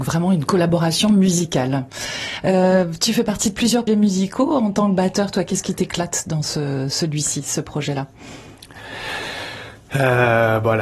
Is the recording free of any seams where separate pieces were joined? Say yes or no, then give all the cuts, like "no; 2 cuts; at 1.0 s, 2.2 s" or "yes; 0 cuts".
no; 1 cut; at 3.9 s